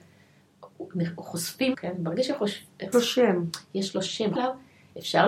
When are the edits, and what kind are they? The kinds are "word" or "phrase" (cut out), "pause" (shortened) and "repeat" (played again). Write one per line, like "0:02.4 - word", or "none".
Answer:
0:01.7 - word
0:02.9 - word
0:04.4 - phrase